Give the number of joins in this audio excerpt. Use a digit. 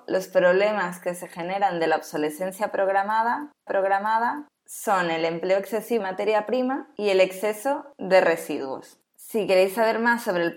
2